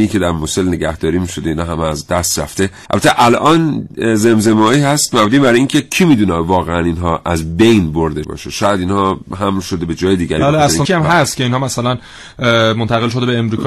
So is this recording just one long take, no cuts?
no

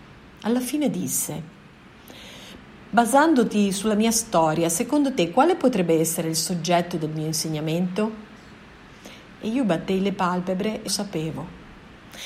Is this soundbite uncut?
no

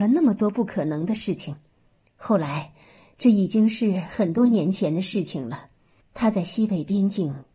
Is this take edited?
no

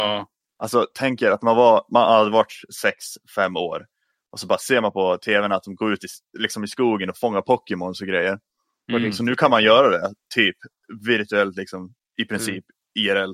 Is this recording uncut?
yes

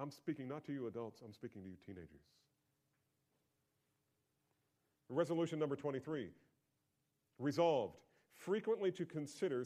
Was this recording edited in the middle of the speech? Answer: no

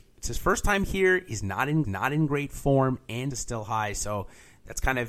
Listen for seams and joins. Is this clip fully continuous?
no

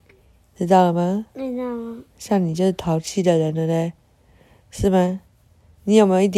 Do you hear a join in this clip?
no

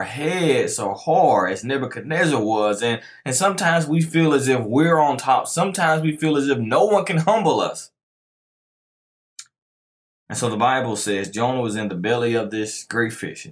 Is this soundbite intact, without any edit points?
yes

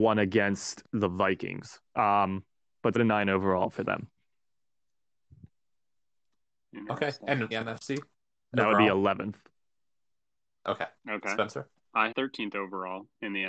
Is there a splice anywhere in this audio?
yes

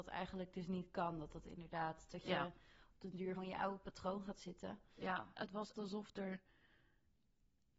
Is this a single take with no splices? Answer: no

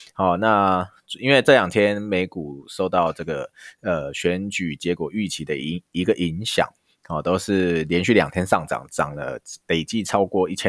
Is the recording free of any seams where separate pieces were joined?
yes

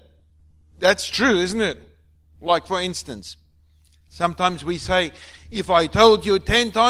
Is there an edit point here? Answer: no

